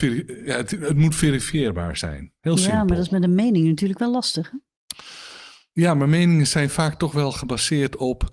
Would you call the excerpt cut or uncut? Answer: uncut